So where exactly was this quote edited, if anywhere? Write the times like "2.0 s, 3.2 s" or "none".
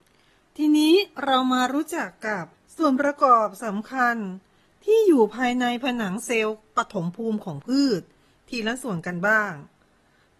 2.5 s

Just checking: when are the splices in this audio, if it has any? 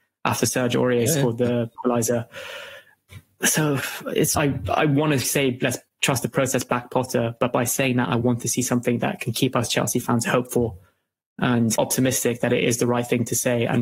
1.7 s, 4.3 s, 11.8 s

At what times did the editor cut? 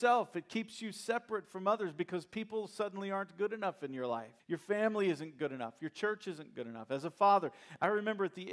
4.4 s

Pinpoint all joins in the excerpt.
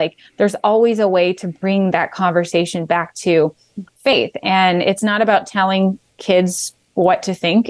6.1 s

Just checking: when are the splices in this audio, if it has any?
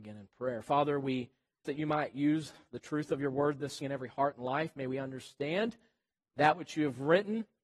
1.6 s, 3.8 s

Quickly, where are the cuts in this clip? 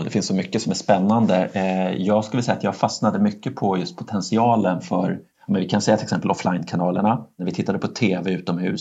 none

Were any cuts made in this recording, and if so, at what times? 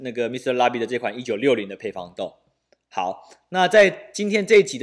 none

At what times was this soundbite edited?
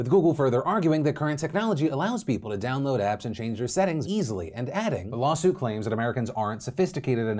4.0 s

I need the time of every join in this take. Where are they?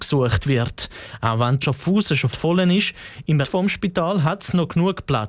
1.6 s, 2.3 s, 3.4 s

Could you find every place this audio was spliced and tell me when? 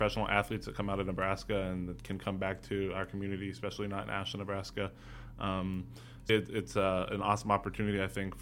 6.3 s

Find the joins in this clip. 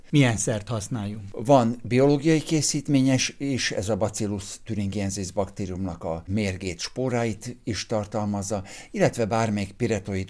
none

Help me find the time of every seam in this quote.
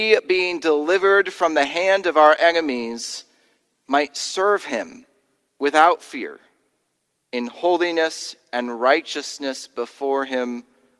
none

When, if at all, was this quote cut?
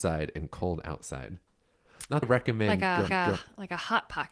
2.2 s, 3.1 s

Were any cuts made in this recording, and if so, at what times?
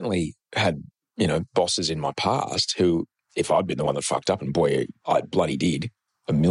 none

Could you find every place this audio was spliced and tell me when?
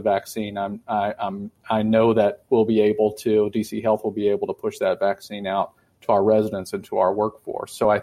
none

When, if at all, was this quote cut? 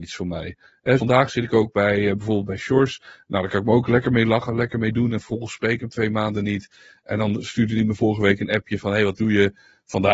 1.0 s

